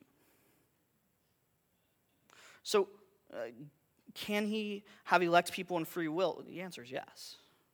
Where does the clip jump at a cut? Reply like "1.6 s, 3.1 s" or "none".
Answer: none